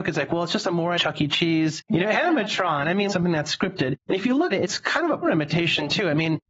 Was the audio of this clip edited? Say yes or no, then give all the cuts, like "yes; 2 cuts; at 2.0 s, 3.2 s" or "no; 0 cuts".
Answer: yes; 4 cuts; at 1.0 s, 3.1 s, 4.5 s, 5.2 s